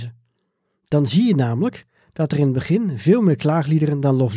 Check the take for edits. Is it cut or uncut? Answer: uncut